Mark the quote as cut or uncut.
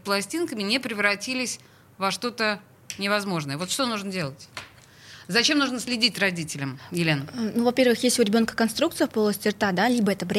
uncut